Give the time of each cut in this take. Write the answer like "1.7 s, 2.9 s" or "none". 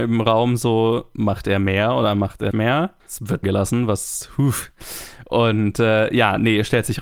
2.5 s, 3.0 s, 3.4 s